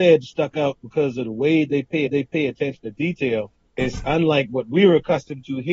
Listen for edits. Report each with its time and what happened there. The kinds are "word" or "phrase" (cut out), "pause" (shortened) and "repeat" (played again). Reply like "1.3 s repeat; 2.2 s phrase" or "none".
2.1 s repeat; 3.7 s pause